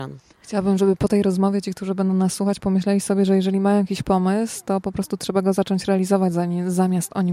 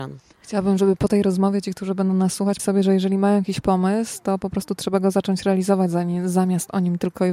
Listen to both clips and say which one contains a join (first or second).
second